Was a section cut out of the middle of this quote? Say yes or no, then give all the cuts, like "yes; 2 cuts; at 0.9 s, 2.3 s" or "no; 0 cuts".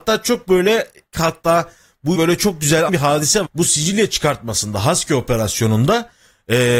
yes; 4 cuts; at 1.1 s, 2.1 s, 2.9 s, 3.4 s